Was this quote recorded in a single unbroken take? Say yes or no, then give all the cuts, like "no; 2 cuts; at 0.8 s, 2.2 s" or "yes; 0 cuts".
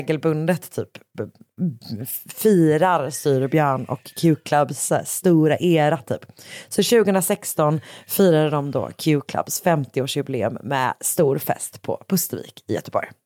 yes; 0 cuts